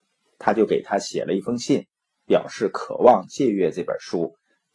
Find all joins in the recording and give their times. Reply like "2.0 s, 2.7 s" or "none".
none